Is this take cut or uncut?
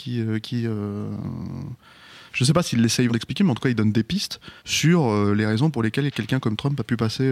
cut